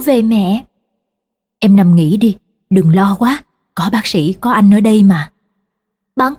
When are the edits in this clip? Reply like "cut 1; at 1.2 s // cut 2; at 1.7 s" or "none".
none